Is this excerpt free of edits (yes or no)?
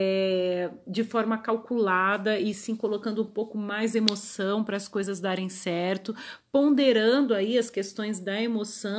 yes